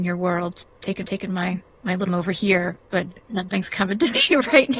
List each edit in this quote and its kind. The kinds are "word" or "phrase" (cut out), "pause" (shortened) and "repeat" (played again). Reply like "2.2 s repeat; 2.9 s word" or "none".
1.0 s repeat; 2.1 s word